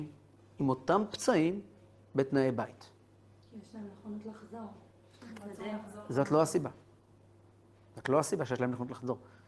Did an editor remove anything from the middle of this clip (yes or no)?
no